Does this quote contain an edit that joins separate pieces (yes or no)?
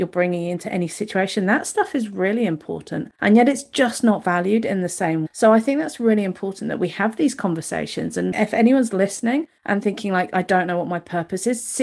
yes